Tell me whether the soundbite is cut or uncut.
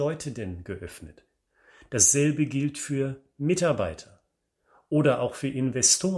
uncut